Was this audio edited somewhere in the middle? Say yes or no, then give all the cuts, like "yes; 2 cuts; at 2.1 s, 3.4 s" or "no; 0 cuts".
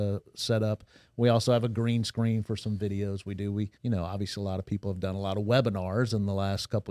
yes; 1 cut; at 3.8 s